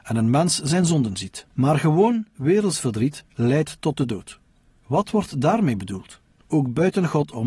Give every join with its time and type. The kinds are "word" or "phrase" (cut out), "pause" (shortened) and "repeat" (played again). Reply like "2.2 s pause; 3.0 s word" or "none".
1.5 s pause